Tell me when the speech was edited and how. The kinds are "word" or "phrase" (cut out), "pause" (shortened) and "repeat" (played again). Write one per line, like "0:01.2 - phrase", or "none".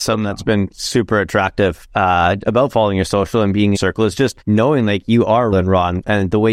0:03.7 - phrase
0:04.4 - pause
0:05.5 - word